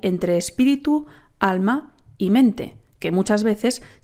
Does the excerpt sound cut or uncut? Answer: uncut